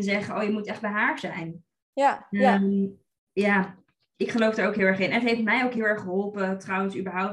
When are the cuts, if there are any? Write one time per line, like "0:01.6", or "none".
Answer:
none